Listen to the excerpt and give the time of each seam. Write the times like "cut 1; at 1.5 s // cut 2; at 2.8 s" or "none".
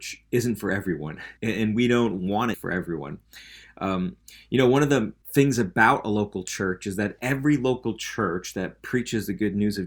cut 1; at 1.4 s // cut 2; at 2.5 s // cut 3; at 5.2 s